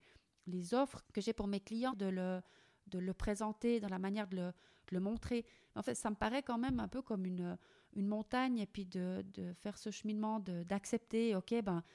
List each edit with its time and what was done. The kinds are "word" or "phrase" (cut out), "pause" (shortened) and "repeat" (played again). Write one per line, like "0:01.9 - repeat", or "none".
0:01.0 - word
0:01.9 - phrase
0:05.9 - word

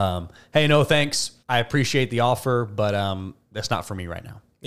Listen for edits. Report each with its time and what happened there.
0:01.4 - pause

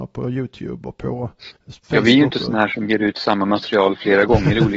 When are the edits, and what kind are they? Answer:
0:01.6 - pause

